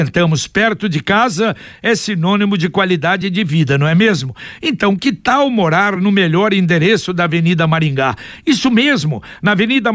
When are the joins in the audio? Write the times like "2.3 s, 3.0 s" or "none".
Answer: none